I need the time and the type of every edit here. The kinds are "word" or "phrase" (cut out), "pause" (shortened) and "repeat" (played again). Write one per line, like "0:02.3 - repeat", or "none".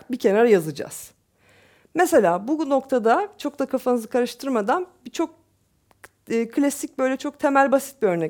none